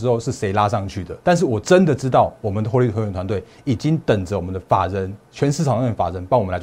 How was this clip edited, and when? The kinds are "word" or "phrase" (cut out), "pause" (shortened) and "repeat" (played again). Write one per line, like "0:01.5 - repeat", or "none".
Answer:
0:01.2 - pause